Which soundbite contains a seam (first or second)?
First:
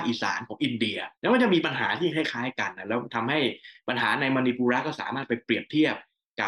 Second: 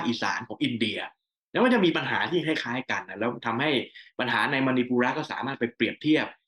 first